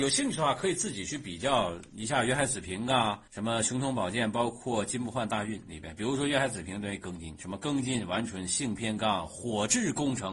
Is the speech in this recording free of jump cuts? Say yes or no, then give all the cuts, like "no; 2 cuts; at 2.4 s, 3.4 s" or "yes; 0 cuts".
no; 2 cuts; at 1.9 s, 3.3 s